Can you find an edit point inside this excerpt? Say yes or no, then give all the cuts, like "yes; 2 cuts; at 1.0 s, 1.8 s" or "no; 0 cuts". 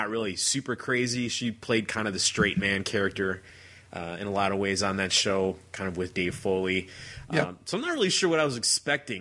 no; 0 cuts